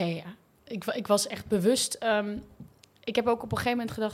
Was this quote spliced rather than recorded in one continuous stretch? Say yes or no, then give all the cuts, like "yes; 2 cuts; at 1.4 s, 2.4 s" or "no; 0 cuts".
no; 0 cuts